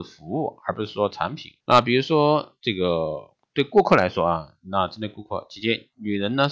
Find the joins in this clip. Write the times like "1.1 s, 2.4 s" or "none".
1.6 s